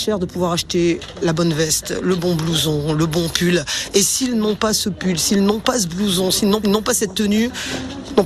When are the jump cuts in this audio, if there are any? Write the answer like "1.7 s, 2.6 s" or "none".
6.6 s